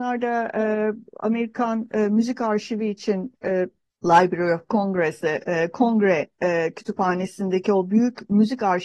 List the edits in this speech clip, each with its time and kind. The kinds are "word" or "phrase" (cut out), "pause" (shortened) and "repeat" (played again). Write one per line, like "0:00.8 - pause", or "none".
0:03.9 - pause